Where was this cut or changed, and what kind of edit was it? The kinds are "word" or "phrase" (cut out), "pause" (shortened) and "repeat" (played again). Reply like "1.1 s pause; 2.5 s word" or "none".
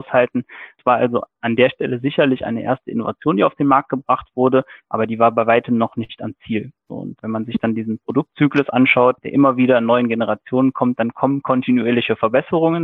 none

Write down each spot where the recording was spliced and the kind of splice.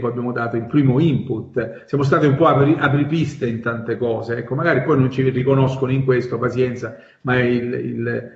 none

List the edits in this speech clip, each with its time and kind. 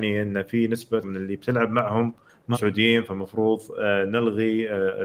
1.0 s word; 2.5 s word

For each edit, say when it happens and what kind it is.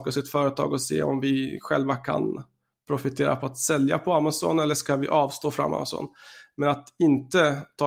none

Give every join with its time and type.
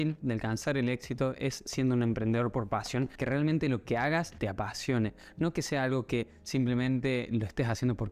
none

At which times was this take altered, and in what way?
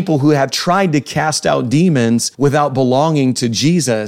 2.3 s pause

